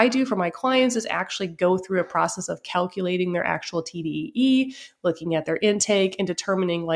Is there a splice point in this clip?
no; 0 cuts

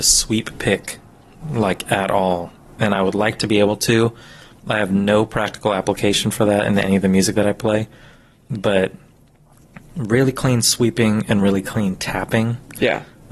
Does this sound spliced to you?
no; 0 cuts

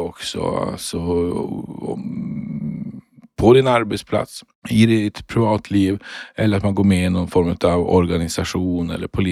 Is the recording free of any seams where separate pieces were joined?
yes; 0 cuts

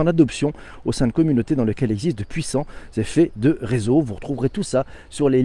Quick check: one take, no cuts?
yes; 0 cuts

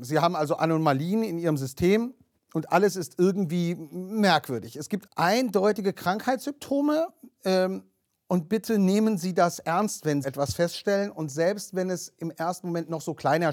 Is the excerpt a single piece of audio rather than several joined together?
no; 2 cuts; at 5.1 s, 10.2 s

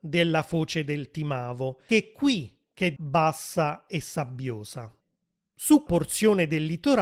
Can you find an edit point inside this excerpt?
yes; 3 cuts; at 1.9 s, 3.0 s, 5.9 s

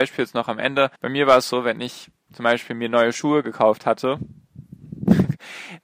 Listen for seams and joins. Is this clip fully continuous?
no; 1 cut; at 1.0 s

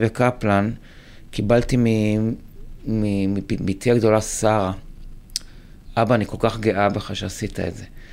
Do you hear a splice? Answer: no; 0 cuts

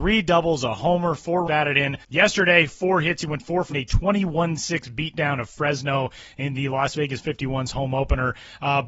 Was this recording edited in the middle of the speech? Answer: yes; 3 cuts; at 1.4 s, 2.0 s, 3.7 s

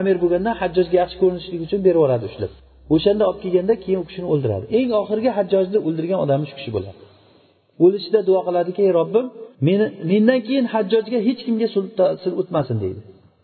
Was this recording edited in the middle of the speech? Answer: yes; 2 cuts; at 2.6 s, 9.5 s

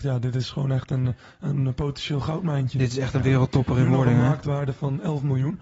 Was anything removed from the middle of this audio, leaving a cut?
no; 0 cuts

